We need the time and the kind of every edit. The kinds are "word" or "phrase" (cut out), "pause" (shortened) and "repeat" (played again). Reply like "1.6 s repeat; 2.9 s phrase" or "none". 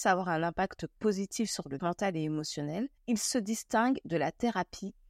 1.8 s word; 3.0 s pause